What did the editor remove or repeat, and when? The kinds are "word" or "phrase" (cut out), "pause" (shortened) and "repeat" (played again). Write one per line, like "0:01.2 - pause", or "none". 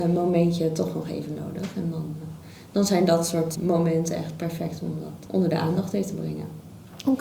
0:03.6 - word
0:05.3 - word